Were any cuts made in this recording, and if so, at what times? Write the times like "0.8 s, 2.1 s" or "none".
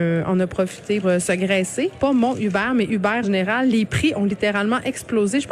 1.0 s, 3.2 s